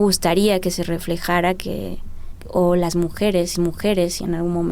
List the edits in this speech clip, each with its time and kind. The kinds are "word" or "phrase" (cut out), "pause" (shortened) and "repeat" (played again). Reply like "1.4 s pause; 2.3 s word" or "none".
3.5 s repeat